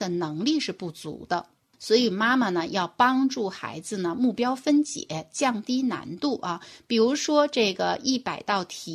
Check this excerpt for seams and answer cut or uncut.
cut